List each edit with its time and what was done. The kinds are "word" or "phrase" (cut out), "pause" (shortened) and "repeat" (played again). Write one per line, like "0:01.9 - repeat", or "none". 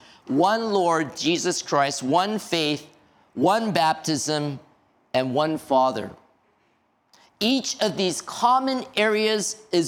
none